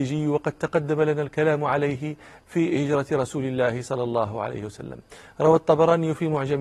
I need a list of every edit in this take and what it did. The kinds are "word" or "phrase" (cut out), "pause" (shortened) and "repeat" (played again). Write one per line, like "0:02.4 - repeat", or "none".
none